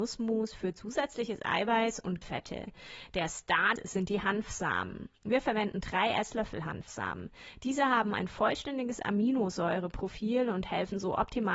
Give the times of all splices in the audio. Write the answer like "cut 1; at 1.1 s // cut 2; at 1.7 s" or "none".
cut 1; at 2.2 s // cut 2; at 3.8 s